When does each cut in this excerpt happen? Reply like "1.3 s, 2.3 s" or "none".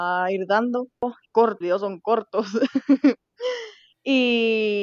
1.3 s, 1.6 s